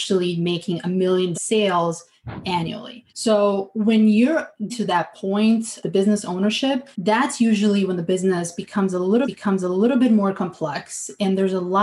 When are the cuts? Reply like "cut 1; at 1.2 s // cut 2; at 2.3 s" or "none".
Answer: cut 1; at 1.3 s // cut 2; at 3.1 s // cut 3; at 4.7 s // cut 4; at 5.8 s // cut 5; at 6.9 s // cut 6; at 9.2 s